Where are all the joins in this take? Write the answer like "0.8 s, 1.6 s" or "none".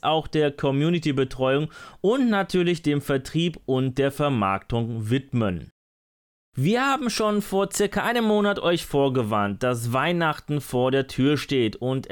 none

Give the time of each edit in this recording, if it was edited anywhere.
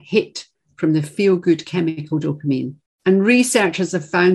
2.9 s

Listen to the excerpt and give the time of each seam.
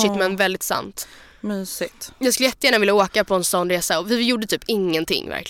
none

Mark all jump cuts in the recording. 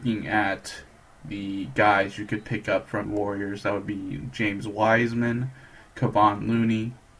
3.0 s

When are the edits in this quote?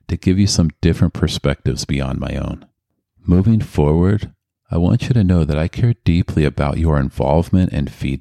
none

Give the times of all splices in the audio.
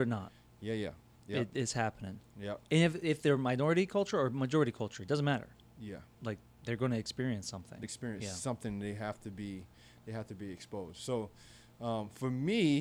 6.1 s, 7.8 s

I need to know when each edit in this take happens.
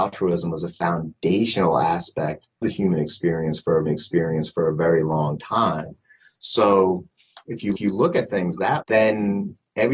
2.6 s, 3.9 s, 7.8 s, 8.8 s

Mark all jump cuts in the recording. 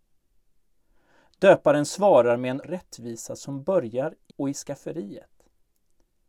2.6 s, 4.3 s

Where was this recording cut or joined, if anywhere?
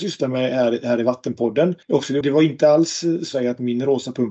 1.8 s, 2.2 s, 3.3 s

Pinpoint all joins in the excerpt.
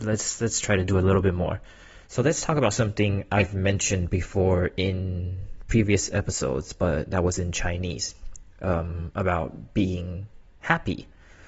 2.0 s

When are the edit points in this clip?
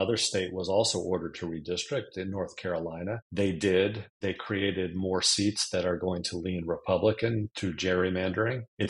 none

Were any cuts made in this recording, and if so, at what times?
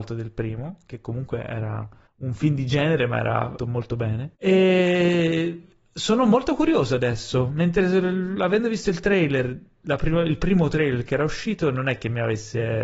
2.1 s, 3.6 s, 4.3 s

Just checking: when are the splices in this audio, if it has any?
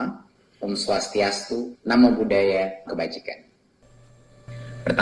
1.8 s, 2.9 s

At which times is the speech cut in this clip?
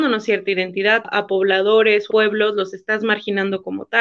1.0 s, 2.1 s

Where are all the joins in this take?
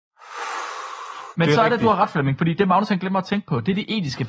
none

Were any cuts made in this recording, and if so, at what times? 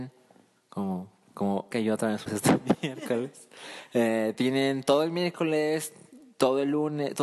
1.7 s, 2.3 s

